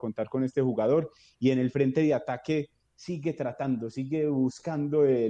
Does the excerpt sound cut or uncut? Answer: uncut